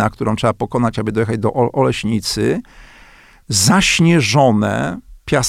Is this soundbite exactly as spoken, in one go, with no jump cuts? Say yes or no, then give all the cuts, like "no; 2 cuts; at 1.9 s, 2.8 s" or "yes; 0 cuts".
yes; 0 cuts